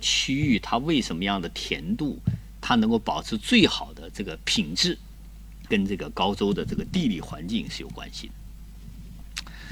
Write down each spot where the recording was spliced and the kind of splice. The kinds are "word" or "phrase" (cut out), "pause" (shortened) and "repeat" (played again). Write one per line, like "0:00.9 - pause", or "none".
0:05.7 - word